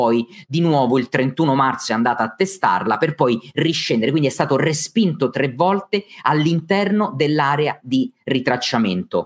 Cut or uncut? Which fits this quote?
uncut